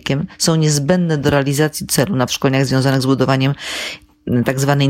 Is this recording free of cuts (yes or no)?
no